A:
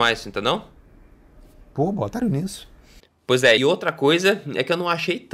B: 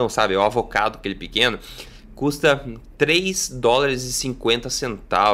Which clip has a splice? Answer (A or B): A